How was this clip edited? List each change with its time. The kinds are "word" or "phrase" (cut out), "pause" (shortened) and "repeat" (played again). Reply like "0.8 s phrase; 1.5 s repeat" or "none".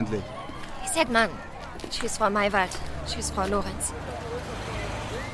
1.1 s word

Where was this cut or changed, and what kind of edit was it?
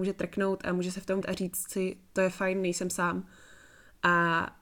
1.2 s word

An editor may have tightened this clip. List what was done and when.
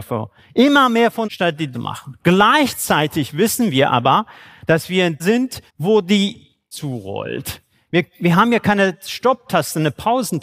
1.2 s word; 1.7 s phrase; 5.2 s word; 5.7 s pause; 6.7 s phrase

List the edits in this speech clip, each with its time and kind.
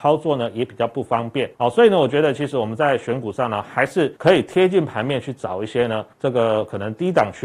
1.5 s pause; 4.2 s pause; 6.1 s pause

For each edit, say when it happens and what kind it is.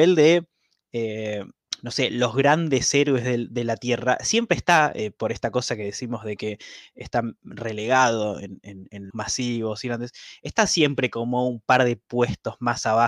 9.1 s phrase

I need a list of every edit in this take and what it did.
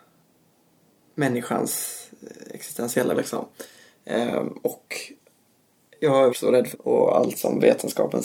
3.1 s word; 6.3 s word; 6.7 s word

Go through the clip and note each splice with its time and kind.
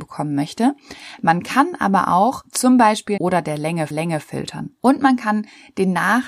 3.2 s phrase; 3.9 s repeat

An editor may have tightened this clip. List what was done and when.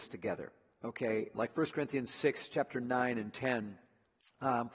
1.3 s word

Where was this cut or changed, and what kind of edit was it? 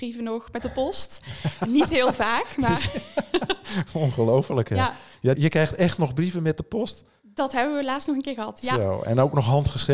5.4 s word

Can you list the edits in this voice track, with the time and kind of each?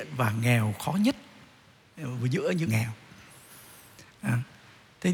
2.7 s word

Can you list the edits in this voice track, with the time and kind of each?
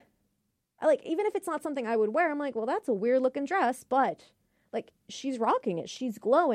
none

